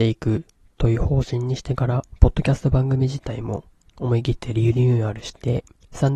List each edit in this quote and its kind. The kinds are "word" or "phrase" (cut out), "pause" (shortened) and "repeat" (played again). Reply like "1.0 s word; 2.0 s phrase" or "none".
none